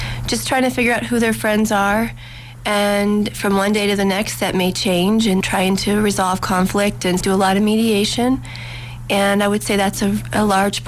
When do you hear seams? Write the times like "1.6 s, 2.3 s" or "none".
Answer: 5.4 s, 7.2 s